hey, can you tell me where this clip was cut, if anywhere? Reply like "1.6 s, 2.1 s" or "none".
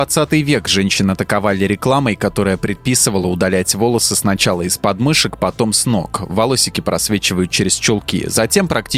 none